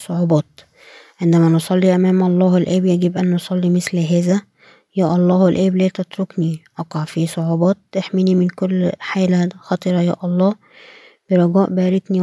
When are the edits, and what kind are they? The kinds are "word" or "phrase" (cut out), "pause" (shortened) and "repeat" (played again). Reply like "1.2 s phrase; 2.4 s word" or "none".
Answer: none